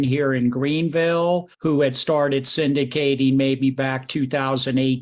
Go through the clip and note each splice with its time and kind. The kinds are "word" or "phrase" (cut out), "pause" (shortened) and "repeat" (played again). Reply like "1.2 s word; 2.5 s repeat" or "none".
1.5 s pause